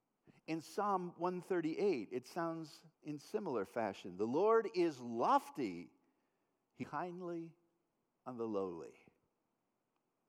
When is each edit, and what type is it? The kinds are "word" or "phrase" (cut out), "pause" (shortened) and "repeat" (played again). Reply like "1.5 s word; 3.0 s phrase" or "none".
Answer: 2.9 s pause; 6.8 s word